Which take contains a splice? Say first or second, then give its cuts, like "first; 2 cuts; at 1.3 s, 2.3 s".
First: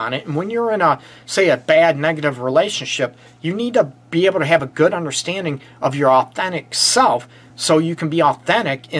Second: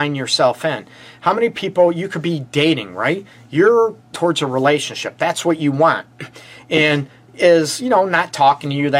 second; 2 cuts; at 4.1 s, 7.3 s